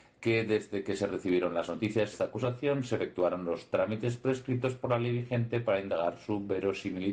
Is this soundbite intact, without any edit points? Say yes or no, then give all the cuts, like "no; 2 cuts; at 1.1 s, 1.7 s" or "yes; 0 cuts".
no; 1 cut; at 2.1 s